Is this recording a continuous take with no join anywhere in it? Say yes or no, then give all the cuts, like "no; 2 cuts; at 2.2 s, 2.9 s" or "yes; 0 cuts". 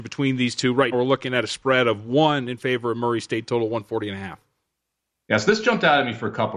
no; 1 cut; at 0.9 s